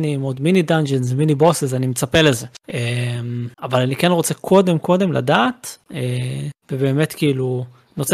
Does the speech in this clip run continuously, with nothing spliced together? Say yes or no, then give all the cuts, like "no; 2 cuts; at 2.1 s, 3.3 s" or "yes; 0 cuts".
no; 2 cuts; at 3.5 s, 6.6 s